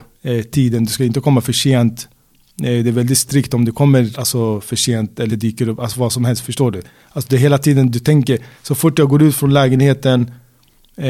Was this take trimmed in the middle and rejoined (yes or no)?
yes